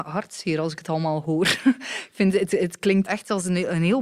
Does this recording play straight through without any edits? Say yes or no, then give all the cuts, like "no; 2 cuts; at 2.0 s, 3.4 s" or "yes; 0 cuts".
no; 1 cut; at 3.0 s